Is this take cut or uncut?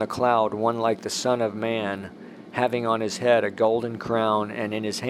uncut